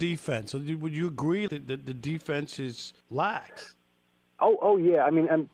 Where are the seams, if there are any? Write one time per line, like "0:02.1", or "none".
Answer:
0:01.5
0:03.0